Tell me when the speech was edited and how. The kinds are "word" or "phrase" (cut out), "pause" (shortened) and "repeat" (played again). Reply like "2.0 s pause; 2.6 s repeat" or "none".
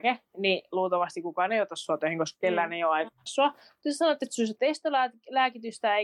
3.3 s word